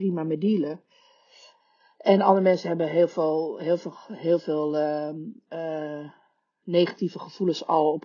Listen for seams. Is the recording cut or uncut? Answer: uncut